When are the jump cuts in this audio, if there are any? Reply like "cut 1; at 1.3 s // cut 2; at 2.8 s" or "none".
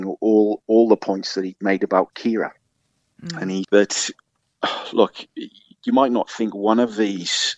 cut 1; at 3.6 s